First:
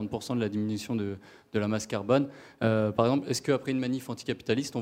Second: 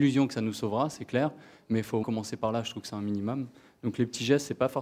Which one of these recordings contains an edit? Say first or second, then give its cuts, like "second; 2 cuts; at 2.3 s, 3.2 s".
second; 1 cut; at 2.0 s